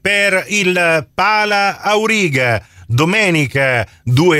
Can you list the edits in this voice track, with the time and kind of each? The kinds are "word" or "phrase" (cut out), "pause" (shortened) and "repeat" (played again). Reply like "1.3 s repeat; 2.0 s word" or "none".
none